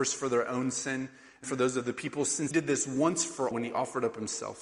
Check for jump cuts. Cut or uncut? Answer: cut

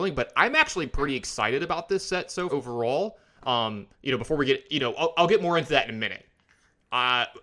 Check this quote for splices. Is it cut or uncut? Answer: cut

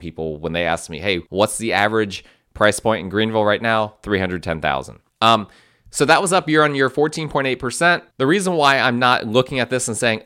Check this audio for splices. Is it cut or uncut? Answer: cut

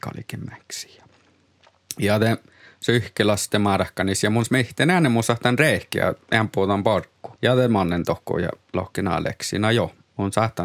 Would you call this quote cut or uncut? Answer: cut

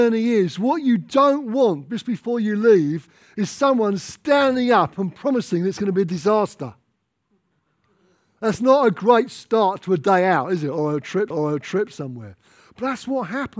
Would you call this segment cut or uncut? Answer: cut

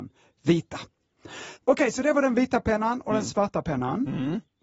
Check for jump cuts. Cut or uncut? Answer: cut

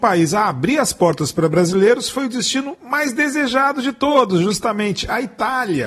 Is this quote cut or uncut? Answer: uncut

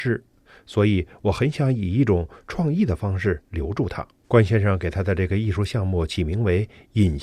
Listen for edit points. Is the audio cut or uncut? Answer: cut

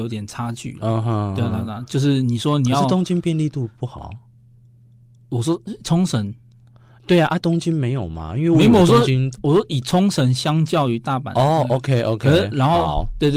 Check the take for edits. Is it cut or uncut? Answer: uncut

